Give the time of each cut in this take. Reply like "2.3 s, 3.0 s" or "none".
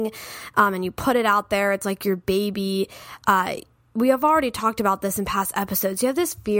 none